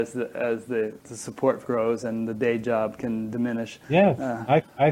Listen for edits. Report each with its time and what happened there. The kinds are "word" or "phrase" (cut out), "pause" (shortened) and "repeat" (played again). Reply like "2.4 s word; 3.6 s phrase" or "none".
1.0 s pause; 1.6 s word; 3.8 s pause